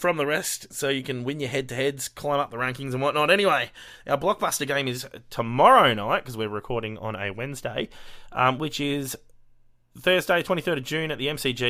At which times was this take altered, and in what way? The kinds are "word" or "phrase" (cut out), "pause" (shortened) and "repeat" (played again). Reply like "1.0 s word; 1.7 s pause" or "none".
none